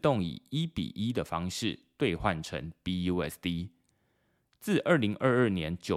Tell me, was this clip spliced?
no; 0 cuts

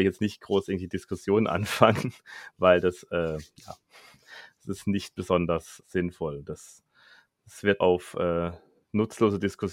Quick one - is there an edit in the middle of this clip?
yes; 2 cuts; at 5.8 s, 7.8 s

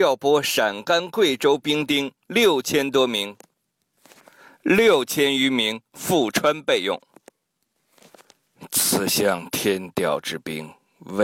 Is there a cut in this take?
no; 0 cuts

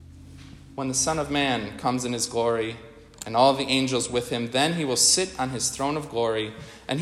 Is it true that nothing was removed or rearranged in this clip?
yes; 0 cuts

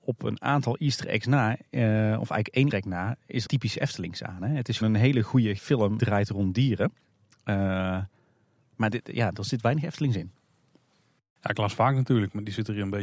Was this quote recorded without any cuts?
no; 5 cuts; at 2.7 s, 3.5 s, 4.8 s, 5.6 s, 6.0 s

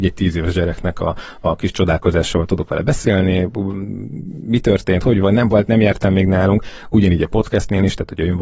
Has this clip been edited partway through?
no; 0 cuts

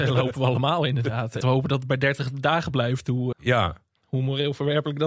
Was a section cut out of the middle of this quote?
yes; 2 cuts; at 1.4 s, 3.3 s

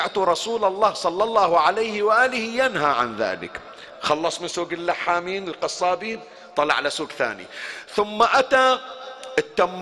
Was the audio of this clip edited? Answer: no; 0 cuts

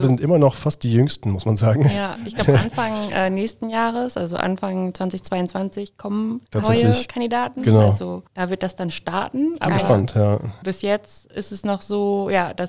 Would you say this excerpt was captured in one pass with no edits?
no; 2 cuts; at 6.5 s, 8.3 s

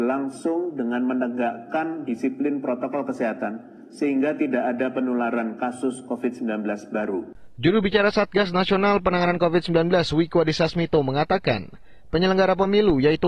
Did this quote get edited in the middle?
no; 0 cuts

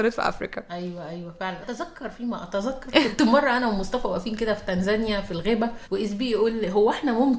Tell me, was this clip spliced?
yes; 2 cuts; at 1.6 s, 5.8 s

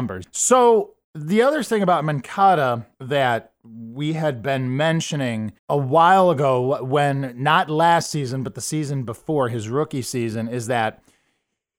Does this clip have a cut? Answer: yes; 3 cuts; at 1.0 s, 2.9 s, 5.6 s

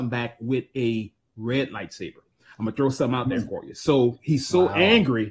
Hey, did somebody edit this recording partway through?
no; 0 cuts

